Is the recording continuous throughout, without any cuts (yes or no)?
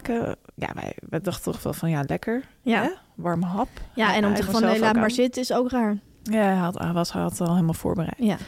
no